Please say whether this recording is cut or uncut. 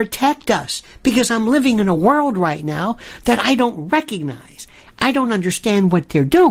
uncut